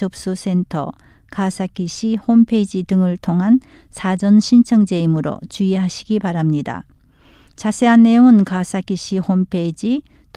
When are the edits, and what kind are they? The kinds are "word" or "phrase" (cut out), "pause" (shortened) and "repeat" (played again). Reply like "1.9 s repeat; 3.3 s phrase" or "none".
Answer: none